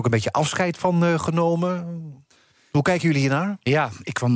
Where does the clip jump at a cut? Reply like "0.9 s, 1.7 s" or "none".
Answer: none

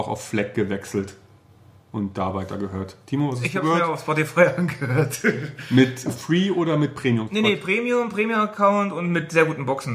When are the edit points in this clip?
none

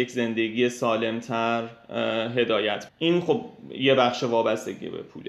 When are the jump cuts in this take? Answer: 2.9 s

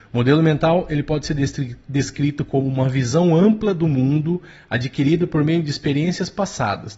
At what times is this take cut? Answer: none

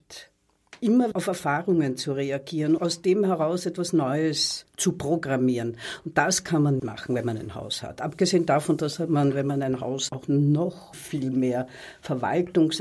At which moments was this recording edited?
1.1 s, 2.8 s, 4.6 s, 6.8 s, 10.1 s, 10.9 s

